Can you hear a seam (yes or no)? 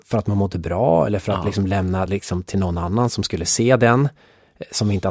no